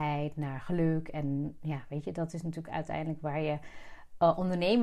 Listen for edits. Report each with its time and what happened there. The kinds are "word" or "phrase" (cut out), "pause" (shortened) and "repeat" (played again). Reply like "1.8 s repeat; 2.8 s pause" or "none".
none